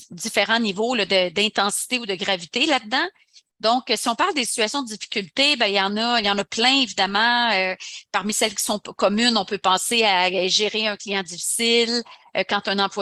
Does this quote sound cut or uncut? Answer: uncut